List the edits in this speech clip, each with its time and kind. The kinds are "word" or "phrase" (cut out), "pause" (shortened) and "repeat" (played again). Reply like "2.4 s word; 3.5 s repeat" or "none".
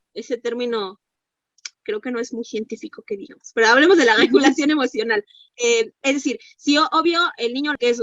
none